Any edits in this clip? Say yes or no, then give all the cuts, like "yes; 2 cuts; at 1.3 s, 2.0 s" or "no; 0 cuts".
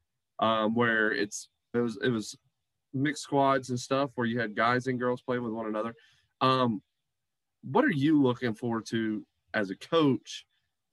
yes; 1 cut; at 1.7 s